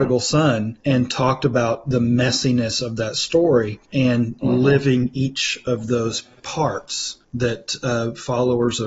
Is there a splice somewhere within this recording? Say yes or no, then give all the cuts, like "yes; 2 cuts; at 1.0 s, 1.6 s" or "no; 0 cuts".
yes; 2 cuts; at 3.8 s, 7.2 s